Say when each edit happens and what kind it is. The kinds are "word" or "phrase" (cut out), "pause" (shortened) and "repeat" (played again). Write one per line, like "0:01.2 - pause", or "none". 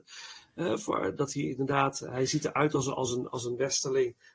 none